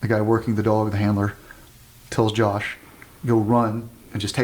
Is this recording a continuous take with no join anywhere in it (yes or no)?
yes